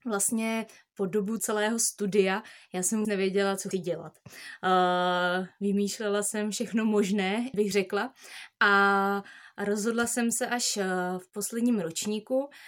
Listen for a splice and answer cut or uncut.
cut